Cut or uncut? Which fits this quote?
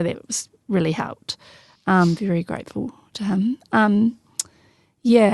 uncut